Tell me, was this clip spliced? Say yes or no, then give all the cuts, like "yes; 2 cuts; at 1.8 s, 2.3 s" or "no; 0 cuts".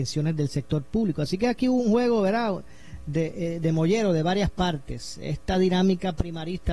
no; 0 cuts